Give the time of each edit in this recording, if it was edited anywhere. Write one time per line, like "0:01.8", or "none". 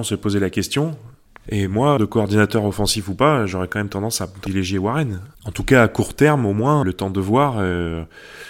0:02.0
0:05.3
0:06.8